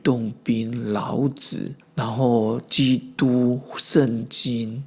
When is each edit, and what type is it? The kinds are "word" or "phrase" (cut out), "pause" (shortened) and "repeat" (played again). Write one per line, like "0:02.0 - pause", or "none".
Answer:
0:01.8 - phrase